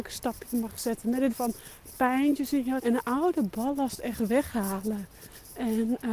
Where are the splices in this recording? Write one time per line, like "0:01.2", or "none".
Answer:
0:01.3
0:02.8